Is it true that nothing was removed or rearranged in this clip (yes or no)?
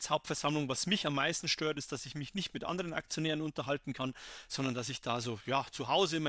yes